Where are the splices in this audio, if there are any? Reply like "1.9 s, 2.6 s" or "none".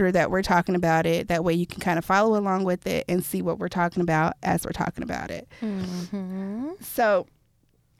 none